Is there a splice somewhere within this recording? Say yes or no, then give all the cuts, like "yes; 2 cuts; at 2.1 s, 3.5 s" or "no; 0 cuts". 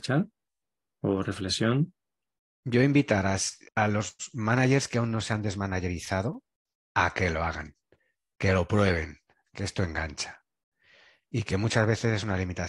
no; 0 cuts